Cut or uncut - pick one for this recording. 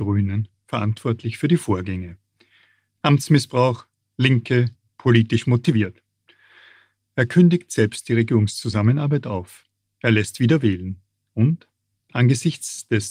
uncut